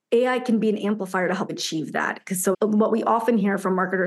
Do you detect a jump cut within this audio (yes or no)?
yes